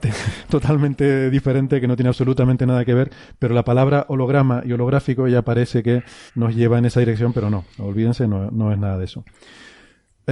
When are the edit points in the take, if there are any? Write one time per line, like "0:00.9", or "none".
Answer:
0:06.3